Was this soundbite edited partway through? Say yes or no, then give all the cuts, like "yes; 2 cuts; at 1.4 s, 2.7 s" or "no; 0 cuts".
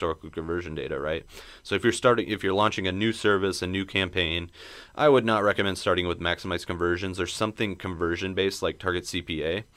no; 0 cuts